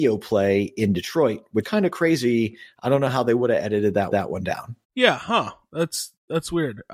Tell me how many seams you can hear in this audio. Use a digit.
3